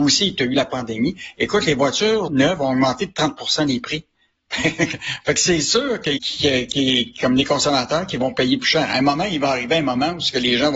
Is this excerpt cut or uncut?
cut